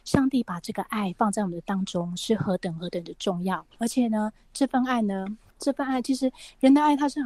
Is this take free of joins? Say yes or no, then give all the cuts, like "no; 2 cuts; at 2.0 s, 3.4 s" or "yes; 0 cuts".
no; 1 cut; at 3.7 s